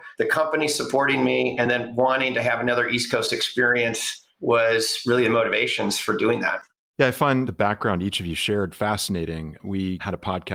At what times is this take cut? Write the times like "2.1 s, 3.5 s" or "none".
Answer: none